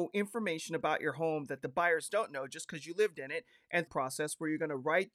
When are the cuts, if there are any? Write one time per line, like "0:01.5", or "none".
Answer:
0:03.9